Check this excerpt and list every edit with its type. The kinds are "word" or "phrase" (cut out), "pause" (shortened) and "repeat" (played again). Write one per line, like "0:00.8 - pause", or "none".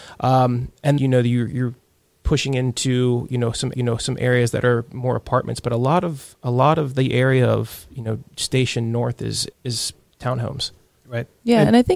0:01.0 - word
0:03.7 - repeat
0:08.3 - pause
0:09.5 - word